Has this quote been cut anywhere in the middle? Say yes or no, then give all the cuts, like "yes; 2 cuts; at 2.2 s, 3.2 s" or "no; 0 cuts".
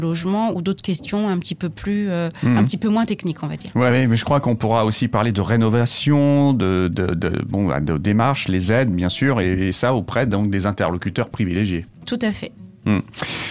yes; 1 cut; at 11.9 s